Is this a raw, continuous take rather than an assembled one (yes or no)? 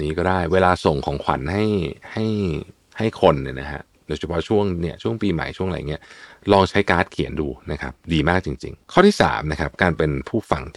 yes